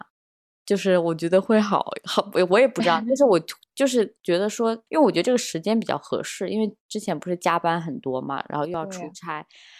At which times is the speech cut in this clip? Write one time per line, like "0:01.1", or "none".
0:04.9